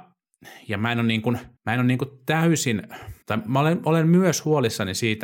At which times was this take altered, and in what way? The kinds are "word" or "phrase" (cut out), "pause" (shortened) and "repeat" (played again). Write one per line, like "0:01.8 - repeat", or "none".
0:01.6 - pause
0:03.2 - pause